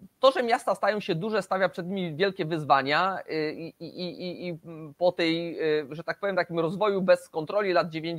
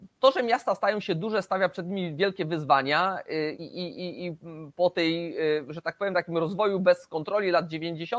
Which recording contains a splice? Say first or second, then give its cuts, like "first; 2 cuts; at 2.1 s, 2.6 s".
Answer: second; 1 cut; at 3.5 s